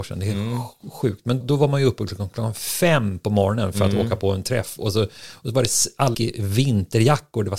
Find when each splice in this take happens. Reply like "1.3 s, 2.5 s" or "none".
1.4 s, 6.1 s